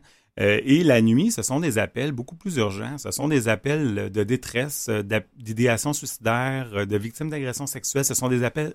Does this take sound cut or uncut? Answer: uncut